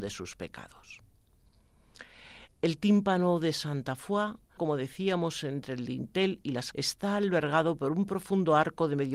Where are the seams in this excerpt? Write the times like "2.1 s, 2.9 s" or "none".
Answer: 4.6 s, 6.7 s

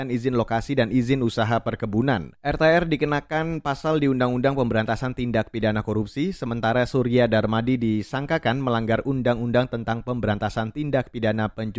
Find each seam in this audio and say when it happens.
2.4 s

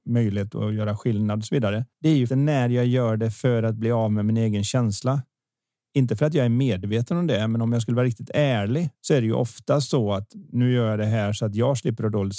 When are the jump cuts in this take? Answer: 1.9 s, 2.3 s, 8.9 s

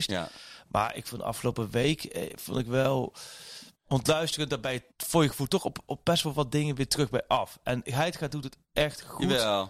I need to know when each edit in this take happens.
3.7 s, 4.9 s

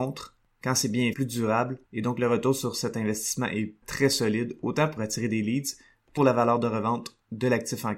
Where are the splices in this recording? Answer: 1.1 s, 1.9 s, 3.8 s, 5.0 s, 6.2 s

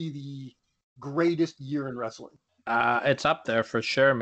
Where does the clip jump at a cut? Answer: 2.5 s

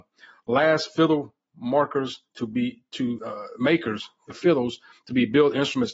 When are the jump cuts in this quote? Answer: 3.2 s, 4.3 s

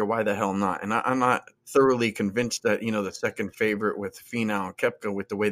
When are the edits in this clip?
1.6 s

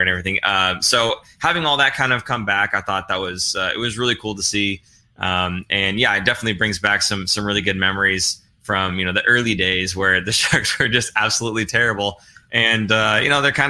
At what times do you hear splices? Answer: none

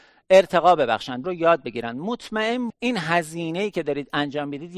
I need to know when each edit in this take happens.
1.2 s, 2.7 s

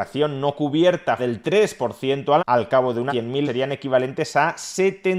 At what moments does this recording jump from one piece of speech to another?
1.2 s, 2.4 s, 3.1 s, 3.4 s

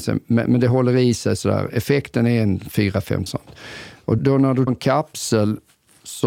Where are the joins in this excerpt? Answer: 3.3 s, 4.2 s, 4.7 s

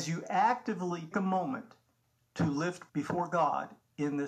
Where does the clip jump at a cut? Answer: 1.1 s, 2.9 s

